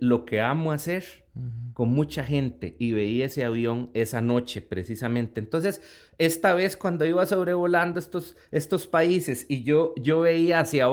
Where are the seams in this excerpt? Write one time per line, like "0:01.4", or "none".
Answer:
none